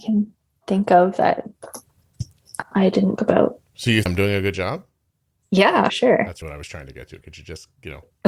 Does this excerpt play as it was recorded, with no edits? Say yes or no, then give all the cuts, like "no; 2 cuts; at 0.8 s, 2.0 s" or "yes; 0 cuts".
no; 6 cuts; at 2.7 s, 3.2 s, 4.1 s, 5.9 s, 6.4 s, 7.2 s